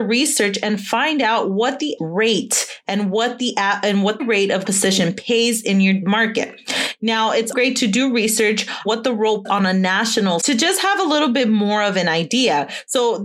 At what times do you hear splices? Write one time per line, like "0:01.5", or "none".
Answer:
0:02.0
0:04.2
0:04.6
0:06.0
0:07.5
0:08.8
0:09.4
0:10.4